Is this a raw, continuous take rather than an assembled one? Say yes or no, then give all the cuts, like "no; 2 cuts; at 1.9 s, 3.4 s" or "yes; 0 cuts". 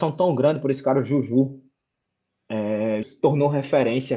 no; 1 cut; at 3.0 s